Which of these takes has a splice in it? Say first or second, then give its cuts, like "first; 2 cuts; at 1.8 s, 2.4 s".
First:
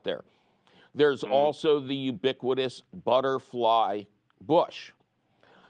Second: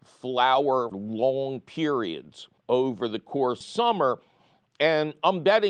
second; 3 cuts; at 0.9 s, 2.6 s, 3.6 s